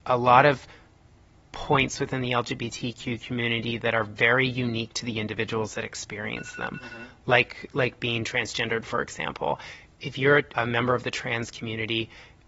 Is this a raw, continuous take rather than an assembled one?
no; 1 cut; at 10.5 s

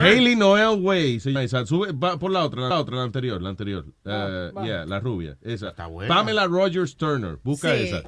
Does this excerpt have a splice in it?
yes; 2 cuts; at 1.4 s, 2.7 s

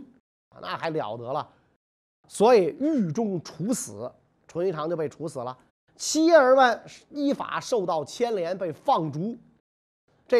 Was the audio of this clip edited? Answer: yes; 1 cut; at 5.7 s

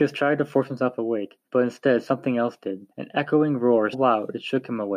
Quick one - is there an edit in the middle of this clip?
yes; 3 cuts; at 1.5 s, 2.9 s, 3.9 s

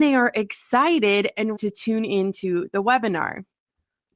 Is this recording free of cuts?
no; 1 cut; at 1.6 s

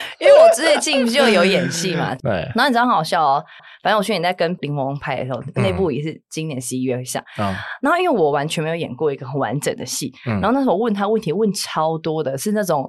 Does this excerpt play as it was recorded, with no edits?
no; 1 cut; at 3.6 s

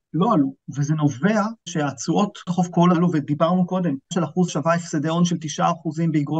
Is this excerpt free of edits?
no; 5 cuts; at 1.7 s, 2.5 s, 2.9 s, 4.1 s, 4.5 s

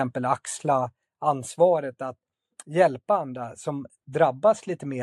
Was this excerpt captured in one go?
yes; 0 cuts

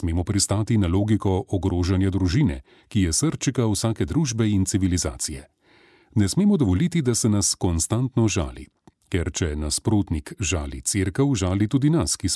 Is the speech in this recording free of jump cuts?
yes; 0 cuts

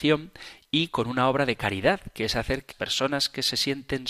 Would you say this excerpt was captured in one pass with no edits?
no; 1 cut; at 2.7 s

